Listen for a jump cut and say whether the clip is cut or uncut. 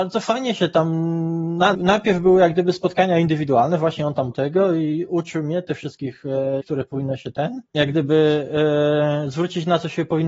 cut